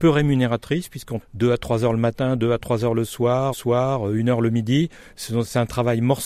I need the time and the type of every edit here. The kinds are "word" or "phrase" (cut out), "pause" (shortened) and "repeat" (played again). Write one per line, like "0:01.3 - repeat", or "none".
0:01.2 - word
0:03.5 - repeat